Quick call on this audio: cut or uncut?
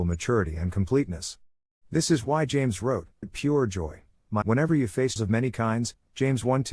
cut